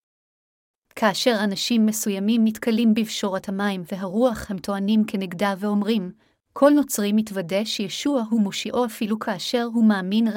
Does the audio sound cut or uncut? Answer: uncut